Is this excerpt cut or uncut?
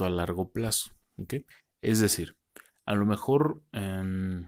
uncut